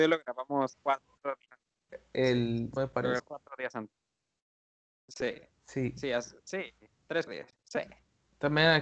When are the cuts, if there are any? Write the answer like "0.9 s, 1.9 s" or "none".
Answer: 1.5 s, 2.8 s, 3.2 s, 5.5 s, 7.3 s